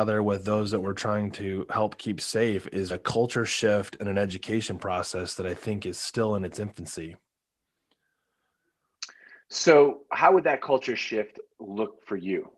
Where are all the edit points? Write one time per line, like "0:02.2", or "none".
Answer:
0:02.9